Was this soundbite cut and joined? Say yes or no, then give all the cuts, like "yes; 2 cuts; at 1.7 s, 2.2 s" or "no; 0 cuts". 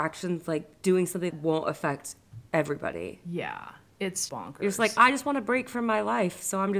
yes; 3 cuts; at 1.3 s, 2.5 s, 4.3 s